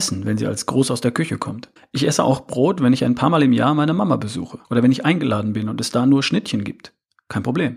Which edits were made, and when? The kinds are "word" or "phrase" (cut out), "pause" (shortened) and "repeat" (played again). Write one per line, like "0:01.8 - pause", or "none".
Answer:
0:01.8 - pause
0:04.6 - pause